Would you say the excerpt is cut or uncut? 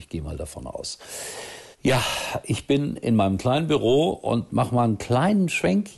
cut